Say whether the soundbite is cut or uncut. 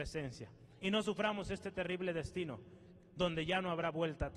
uncut